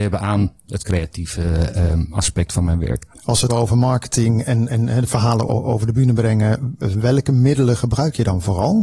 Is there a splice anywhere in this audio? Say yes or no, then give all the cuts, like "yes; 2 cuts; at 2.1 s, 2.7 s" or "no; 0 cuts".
yes; 3 cuts; at 3.1 s, 3.5 s, 5.5 s